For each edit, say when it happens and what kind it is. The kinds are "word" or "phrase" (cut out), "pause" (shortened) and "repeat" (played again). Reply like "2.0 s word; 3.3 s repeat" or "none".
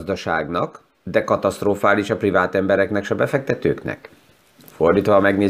none